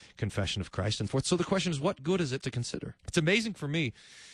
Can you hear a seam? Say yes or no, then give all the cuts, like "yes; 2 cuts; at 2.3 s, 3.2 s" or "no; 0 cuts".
yes; 3 cuts; at 1.1 s, 2.4 s, 3.0 s